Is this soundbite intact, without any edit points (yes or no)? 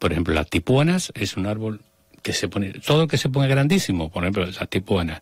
yes